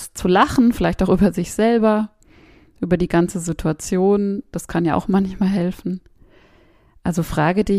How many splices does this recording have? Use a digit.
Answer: 0